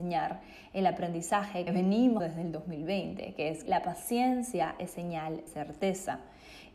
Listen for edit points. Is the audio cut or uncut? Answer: cut